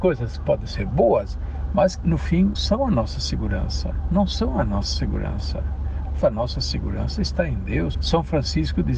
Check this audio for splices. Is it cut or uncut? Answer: cut